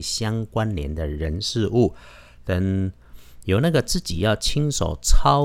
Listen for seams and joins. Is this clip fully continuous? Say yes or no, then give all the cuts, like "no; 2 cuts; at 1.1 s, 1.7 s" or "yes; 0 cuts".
yes; 0 cuts